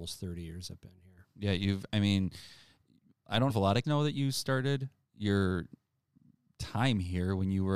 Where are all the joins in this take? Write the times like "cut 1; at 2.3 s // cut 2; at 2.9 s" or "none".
cut 1; at 3.5 s // cut 2; at 3.8 s